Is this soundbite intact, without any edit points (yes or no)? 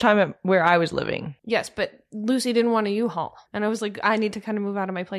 no